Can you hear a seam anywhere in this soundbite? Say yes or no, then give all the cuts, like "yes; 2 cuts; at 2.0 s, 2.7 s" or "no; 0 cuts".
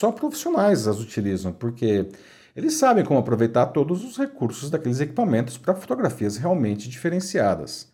no; 0 cuts